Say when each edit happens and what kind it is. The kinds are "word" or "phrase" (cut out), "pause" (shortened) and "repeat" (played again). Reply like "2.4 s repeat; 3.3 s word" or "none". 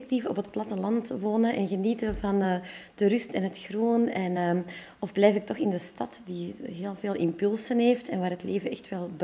none